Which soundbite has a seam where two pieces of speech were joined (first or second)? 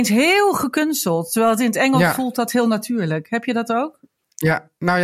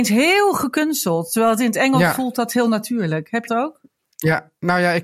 second